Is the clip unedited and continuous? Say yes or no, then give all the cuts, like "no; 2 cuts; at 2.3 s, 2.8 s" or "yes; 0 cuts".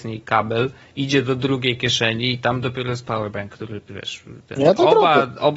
yes; 0 cuts